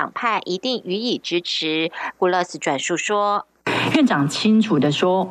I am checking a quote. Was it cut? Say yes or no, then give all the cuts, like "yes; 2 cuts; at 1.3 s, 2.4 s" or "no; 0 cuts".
yes; 1 cut; at 3.6 s